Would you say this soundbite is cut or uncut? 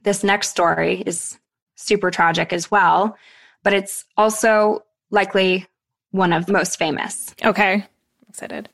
uncut